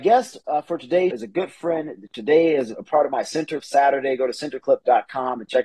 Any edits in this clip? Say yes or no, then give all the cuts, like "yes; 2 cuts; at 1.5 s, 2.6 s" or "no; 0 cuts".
yes; 2 cuts; at 1.1 s, 3.6 s